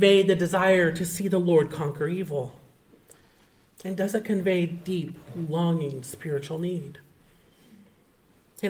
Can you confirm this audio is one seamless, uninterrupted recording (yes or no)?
yes